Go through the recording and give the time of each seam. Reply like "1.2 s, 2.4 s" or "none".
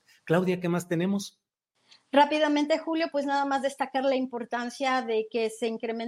none